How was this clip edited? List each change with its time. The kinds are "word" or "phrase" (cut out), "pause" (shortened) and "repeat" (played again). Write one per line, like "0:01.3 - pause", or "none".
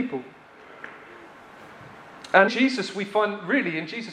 0:02.5 - word